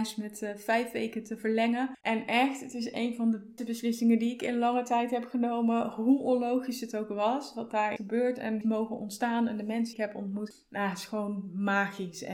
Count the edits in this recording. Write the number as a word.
five